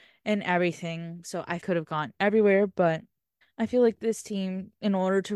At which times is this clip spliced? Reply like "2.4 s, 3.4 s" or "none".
1.6 s, 3.4 s